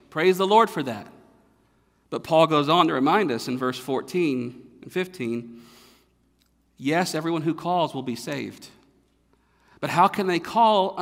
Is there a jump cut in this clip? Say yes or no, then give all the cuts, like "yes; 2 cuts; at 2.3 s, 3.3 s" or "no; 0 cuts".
no; 0 cuts